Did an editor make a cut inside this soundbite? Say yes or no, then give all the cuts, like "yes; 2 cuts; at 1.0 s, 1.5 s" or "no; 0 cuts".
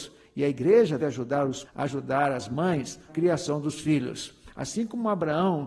yes; 3 cuts; at 1.0 s, 1.6 s, 3.1 s